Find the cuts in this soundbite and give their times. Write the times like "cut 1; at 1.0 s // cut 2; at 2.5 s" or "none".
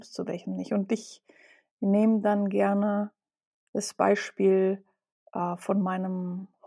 none

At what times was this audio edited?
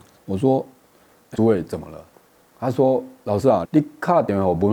cut 1; at 1.3 s // cut 2; at 2.1 s // cut 3; at 3.6 s

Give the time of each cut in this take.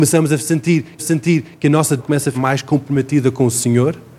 cut 1; at 1.0 s // cut 2; at 2.0 s // cut 3; at 2.3 s

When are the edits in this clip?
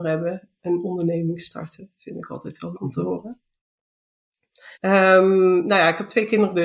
cut 1; at 2.7 s // cut 2; at 4.7 s

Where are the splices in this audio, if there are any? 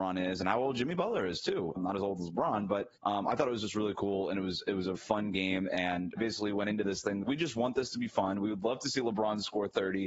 cut 1; at 1.8 s // cut 2; at 3.0 s // cut 3; at 5.0 s // cut 4; at 6.2 s // cut 5; at 7.2 s

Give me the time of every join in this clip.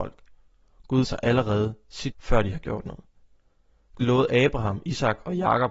cut 1; at 1.0 s // cut 2; at 2.1 s // cut 3; at 4.0 s

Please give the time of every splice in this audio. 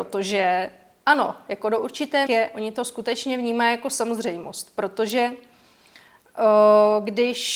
cut 1; at 2.3 s

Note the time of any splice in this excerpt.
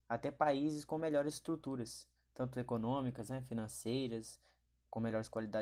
none

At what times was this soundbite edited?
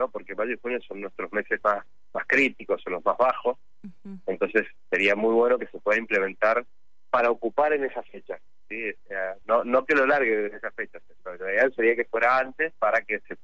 none

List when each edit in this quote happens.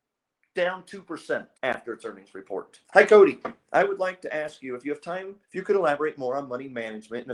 cut 1; at 1.5 s // cut 2; at 2.8 s // cut 3; at 5.4 s

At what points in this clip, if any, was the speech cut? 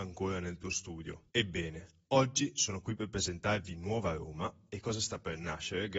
cut 1; at 1.3 s

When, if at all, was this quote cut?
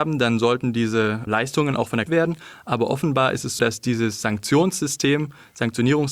cut 1; at 1.3 s // cut 2; at 2.1 s // cut 3; at 3.6 s

